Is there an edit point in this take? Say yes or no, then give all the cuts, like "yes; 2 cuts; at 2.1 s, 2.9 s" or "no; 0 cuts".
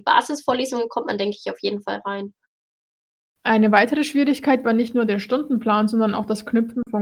no; 0 cuts